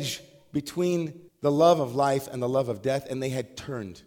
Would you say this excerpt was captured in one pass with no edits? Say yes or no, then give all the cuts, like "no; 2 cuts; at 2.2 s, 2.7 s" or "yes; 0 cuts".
no; 1 cut; at 1.3 s